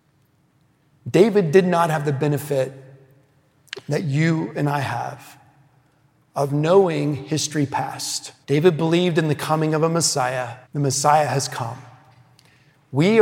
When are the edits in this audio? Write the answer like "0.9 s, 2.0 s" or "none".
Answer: 8.4 s, 10.6 s

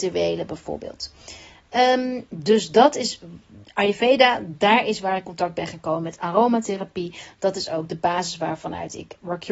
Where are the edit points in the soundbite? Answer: 5.2 s

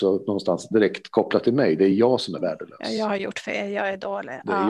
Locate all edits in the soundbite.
none

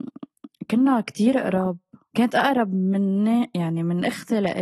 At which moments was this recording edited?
none

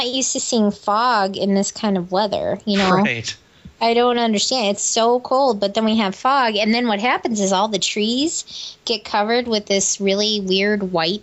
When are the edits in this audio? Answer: 4.8 s

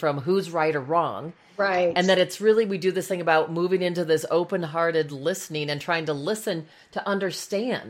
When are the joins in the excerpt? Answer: none

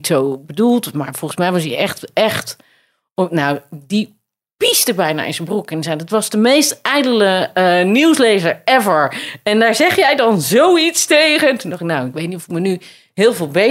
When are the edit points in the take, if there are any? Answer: none

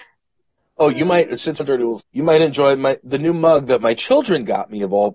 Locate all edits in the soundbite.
1.6 s, 2.0 s

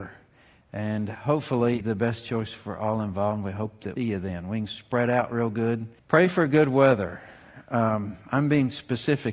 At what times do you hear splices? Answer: 1.8 s, 4.0 s, 6.0 s

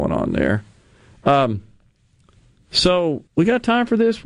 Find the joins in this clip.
3.3 s

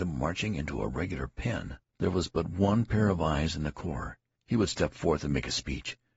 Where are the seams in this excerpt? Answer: 1.9 s, 4.4 s

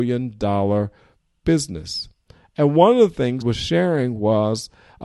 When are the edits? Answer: 3.4 s

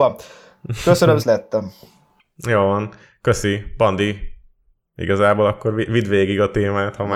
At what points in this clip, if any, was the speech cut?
1.2 s

